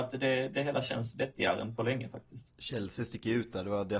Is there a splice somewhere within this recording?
no; 0 cuts

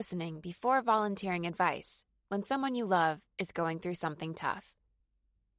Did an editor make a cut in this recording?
no; 0 cuts

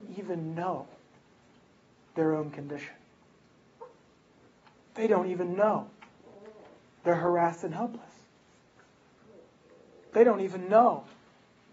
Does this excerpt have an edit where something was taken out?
no; 0 cuts

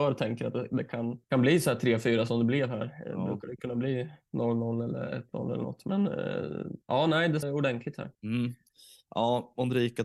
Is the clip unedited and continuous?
no; 4 cuts; at 1.2 s, 6.8 s, 7.4 s, 8.1 s

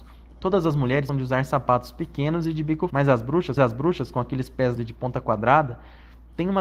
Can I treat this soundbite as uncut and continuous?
no; 4 cuts; at 1.1 s, 2.9 s, 3.6 s, 4.8 s

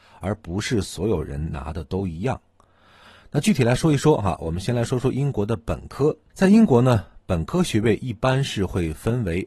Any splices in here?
no; 0 cuts

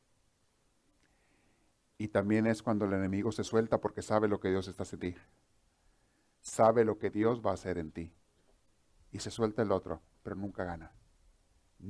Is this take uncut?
no; 1 cut; at 5.0 s

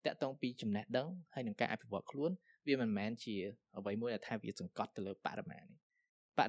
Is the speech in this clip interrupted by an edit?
no; 0 cuts

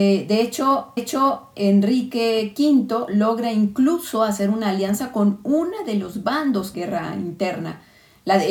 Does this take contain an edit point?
yes; 2 cuts; at 1.0 s, 6.7 s

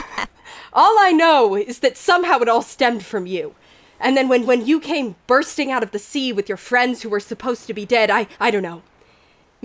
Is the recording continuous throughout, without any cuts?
no; 2 cuts; at 4.5 s, 8.3 s

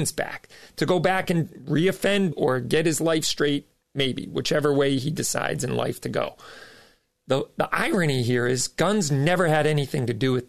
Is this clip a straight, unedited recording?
no; 1 cut; at 2.3 s

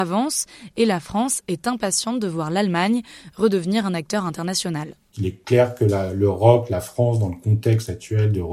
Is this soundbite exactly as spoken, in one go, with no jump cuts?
yes; 0 cuts

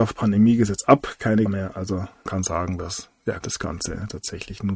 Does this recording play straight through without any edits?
no; 3 cuts; at 1.5 s, 2.3 s, 3.4 s

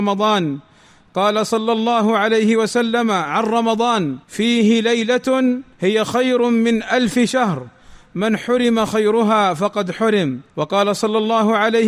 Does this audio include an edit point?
yes; 3 cuts; at 4.2 s, 5.7 s, 10.5 s

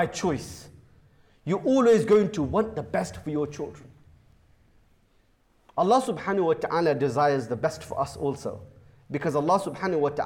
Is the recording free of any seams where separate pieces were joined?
yes; 0 cuts

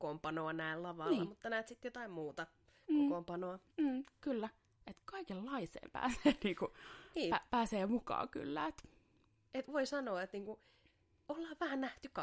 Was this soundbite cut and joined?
yes; 1 cut; at 9.7 s

